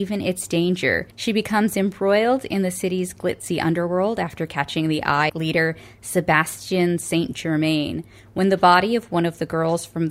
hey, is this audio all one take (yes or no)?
no